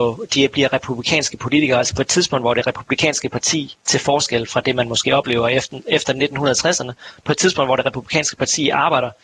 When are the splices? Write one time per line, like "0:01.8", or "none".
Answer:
0:03.8